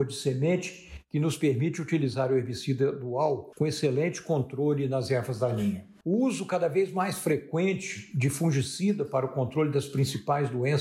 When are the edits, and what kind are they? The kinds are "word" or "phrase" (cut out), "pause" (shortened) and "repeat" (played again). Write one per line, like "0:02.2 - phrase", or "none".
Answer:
none